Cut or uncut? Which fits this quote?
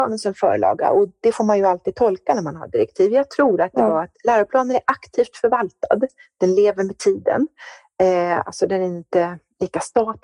uncut